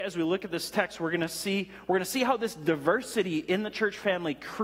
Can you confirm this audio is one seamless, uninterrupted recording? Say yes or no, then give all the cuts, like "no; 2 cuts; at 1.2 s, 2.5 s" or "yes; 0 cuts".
yes; 0 cuts